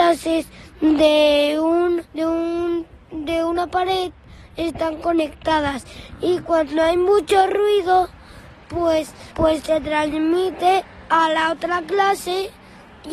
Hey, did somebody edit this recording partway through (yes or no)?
yes